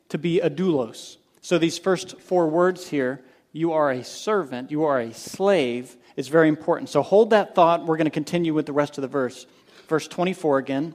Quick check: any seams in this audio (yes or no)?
no